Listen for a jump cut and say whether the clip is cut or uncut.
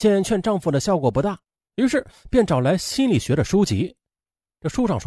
uncut